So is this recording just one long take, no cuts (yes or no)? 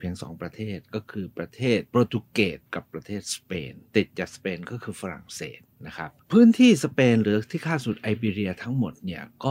no